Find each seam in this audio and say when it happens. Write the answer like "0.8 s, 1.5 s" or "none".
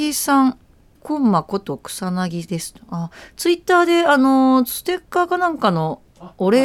0.9 s